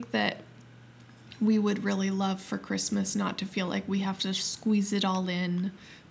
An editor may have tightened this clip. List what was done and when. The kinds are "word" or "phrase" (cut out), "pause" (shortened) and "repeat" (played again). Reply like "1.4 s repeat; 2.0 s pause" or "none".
none